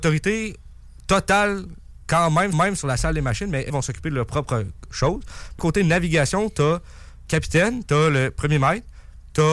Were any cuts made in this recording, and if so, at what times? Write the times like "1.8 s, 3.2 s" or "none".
2.5 s, 3.7 s, 5.6 s, 7.3 s